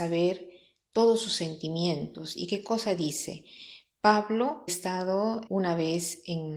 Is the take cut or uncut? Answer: cut